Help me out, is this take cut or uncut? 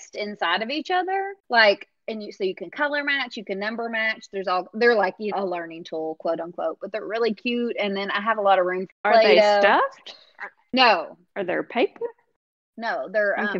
cut